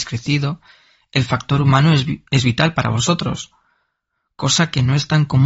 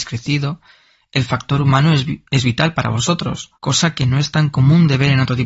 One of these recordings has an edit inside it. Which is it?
second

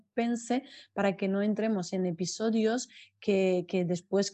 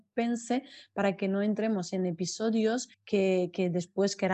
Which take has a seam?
second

